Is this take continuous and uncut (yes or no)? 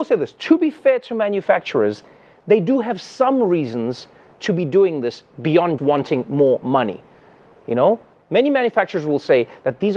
no